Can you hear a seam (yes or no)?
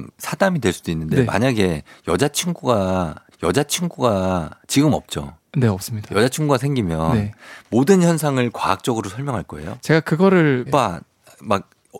yes